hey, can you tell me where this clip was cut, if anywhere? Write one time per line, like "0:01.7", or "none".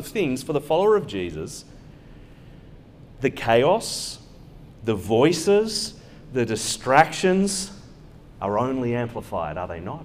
none